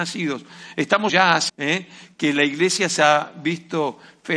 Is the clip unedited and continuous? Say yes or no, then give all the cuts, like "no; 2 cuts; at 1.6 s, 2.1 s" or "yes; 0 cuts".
no; 2 cuts; at 1.1 s, 1.5 s